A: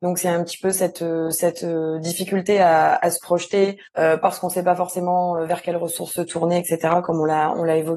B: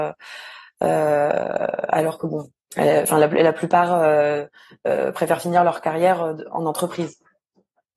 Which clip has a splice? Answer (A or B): A